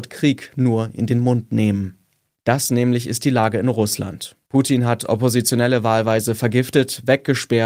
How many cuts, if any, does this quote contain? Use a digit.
0